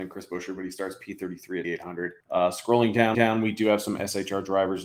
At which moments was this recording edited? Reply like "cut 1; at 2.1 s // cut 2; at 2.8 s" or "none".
cut 1; at 1.6 s // cut 2; at 2.2 s // cut 3; at 3.1 s